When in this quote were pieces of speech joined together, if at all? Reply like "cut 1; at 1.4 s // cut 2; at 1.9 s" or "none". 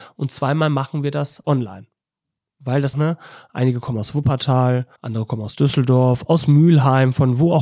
cut 1; at 1.4 s // cut 2; at 2.9 s // cut 3; at 5.0 s